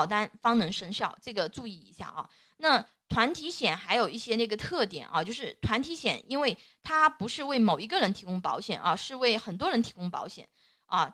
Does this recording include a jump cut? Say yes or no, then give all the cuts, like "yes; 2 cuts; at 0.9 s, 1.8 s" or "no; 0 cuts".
no; 0 cuts